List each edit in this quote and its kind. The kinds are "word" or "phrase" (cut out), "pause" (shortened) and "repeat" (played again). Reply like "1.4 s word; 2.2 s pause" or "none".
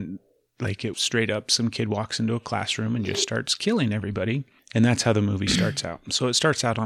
0.9 s word; 4.6 s pause